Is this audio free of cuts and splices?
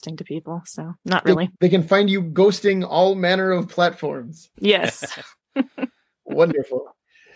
no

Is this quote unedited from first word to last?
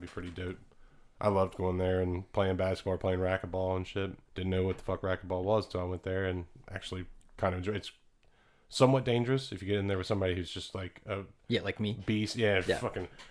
no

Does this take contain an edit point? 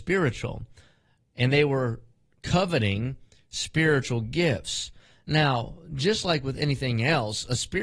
no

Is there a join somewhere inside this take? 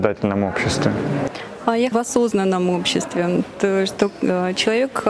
yes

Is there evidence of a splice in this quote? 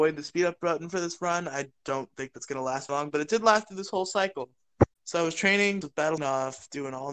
yes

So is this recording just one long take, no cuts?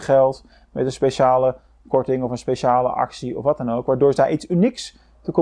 yes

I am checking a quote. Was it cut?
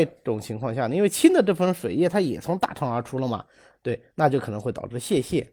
no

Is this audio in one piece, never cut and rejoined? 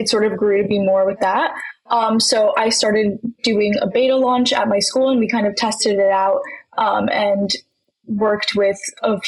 yes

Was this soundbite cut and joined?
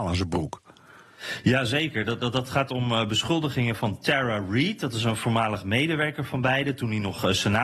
no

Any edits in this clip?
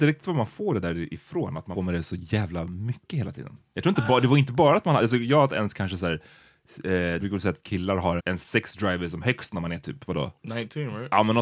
yes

